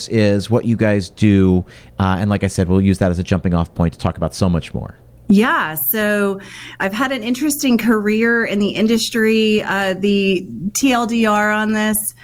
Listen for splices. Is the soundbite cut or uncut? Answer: uncut